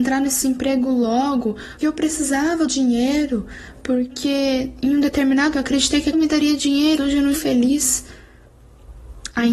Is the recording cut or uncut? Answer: cut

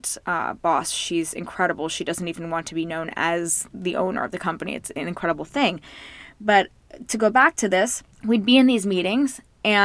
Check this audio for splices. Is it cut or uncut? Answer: cut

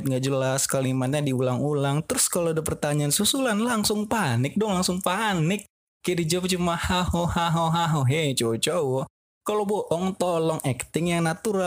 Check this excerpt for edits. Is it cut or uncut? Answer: uncut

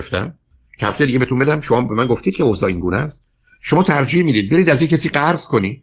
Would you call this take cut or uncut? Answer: uncut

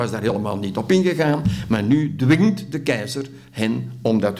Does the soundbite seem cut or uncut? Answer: uncut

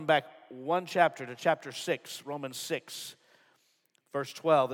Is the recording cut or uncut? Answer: uncut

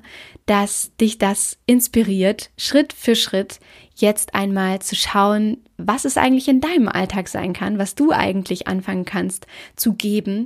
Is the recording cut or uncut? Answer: uncut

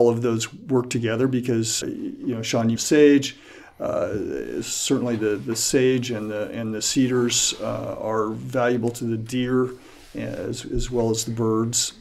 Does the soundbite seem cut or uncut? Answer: cut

